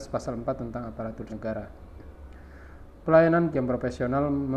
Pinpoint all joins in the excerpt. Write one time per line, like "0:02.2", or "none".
0:01.3
0:03.5